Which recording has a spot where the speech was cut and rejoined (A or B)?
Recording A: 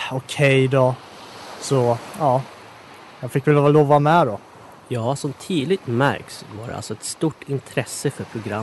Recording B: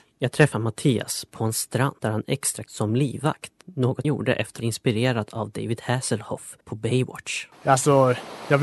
B